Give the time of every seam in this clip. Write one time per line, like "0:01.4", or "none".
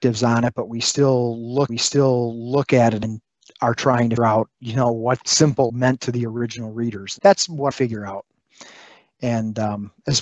0:01.7
0:03.0
0:04.2
0:05.2
0:05.7
0:07.2
0:07.7